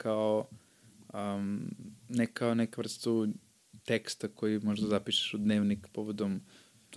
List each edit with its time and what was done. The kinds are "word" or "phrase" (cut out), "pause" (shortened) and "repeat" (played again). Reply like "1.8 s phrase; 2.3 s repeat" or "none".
2.0 s pause; 3.8 s pause

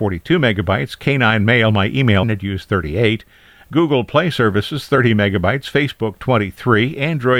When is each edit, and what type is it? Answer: 2.2 s word

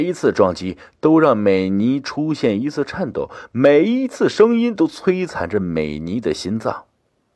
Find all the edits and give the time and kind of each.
none

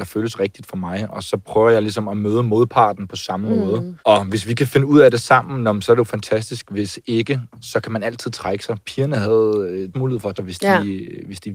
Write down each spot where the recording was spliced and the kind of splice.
4.0 s pause; 9.9 s word; 10.3 s word

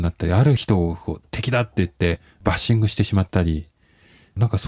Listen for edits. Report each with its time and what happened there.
2.2 s pause

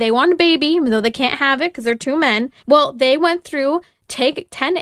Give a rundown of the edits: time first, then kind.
2.6 s pause

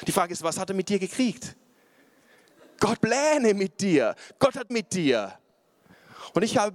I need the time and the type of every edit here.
3.0 s word; 4.7 s word

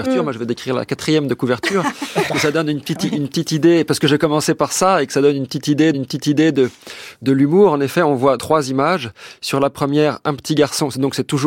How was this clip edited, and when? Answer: 2.3 s word; 5.9 s repeat; 8.4 s word

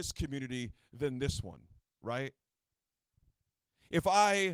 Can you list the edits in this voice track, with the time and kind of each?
none

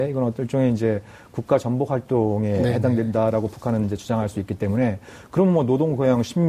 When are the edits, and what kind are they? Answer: none

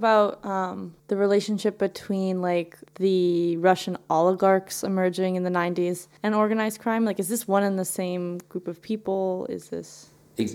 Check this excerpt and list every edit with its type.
1.0 s pause; 2.9 s pause; 6.2 s pause

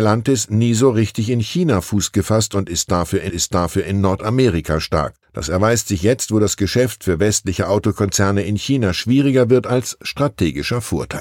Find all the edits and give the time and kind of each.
3.3 s repeat; 5.2 s pause

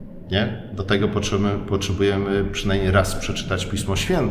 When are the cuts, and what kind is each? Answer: none

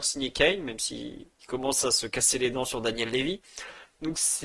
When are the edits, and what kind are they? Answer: none

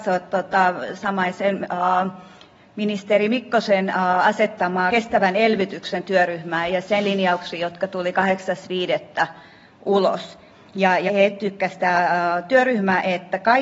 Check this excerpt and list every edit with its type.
4.9 s word; 6.7 s word; 11.1 s word

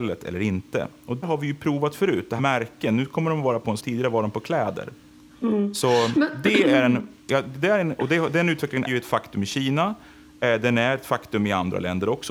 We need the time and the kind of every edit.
1.2 s word; 2.4 s word; 3.8 s word; 8.9 s word

